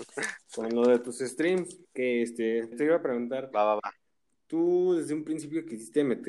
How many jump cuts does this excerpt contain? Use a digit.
2